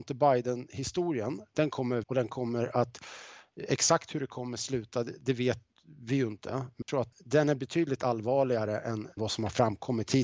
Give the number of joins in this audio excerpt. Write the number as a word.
four